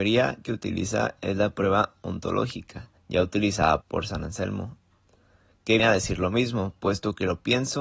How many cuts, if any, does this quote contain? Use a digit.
3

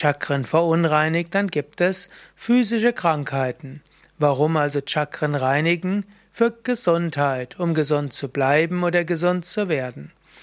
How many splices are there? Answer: 0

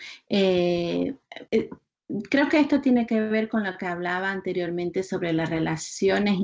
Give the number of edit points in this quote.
1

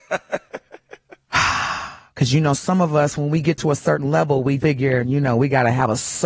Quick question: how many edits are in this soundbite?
1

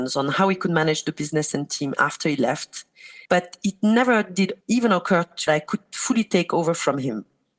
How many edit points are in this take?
3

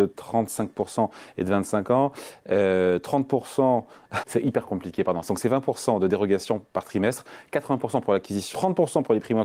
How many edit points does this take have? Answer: 3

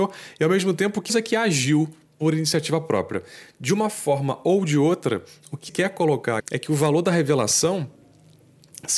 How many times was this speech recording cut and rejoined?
3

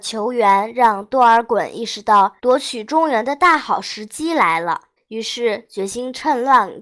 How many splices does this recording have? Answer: 2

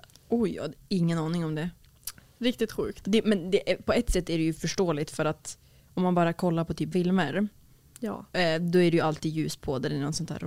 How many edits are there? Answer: 1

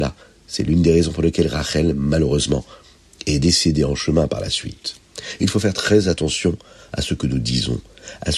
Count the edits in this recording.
0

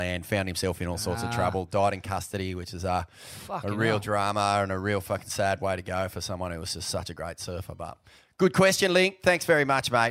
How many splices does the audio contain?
0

